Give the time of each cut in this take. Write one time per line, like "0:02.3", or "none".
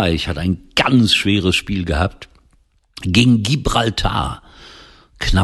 none